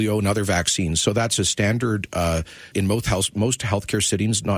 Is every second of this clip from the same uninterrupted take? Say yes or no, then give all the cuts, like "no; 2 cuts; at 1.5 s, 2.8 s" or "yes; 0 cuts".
no; 1 cut; at 2.7 s